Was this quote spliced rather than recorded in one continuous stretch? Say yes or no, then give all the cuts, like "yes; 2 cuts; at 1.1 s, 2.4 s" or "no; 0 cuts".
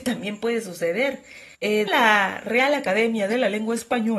yes; 2 cuts; at 1.5 s, 1.9 s